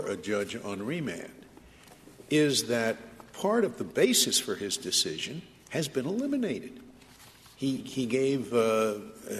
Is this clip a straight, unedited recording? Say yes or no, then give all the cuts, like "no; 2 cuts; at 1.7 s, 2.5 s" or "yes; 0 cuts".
no; 1 cut; at 7.8 s